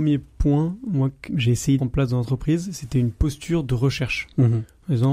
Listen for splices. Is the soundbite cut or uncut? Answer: cut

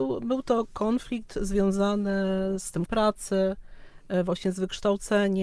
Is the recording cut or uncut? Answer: cut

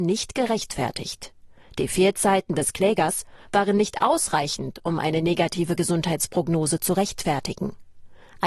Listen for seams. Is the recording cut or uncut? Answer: uncut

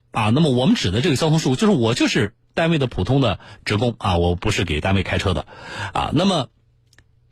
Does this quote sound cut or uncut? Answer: uncut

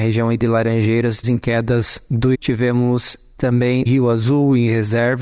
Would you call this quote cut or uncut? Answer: cut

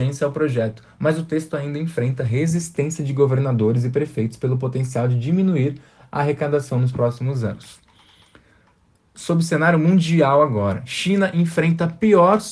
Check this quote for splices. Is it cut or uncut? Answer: uncut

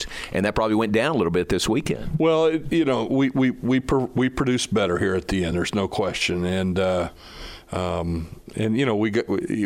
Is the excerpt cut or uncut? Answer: uncut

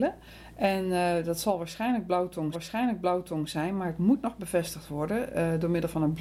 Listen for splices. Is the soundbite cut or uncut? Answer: cut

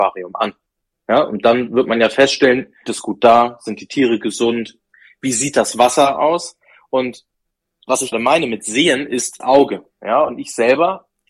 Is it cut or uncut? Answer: cut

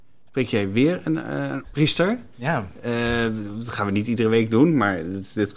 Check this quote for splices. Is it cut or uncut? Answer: cut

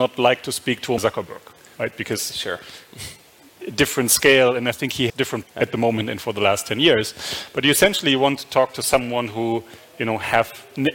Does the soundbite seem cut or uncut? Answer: cut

